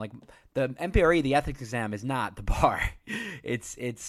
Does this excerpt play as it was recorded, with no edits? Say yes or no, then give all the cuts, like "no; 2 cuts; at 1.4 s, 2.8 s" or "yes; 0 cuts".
yes; 0 cuts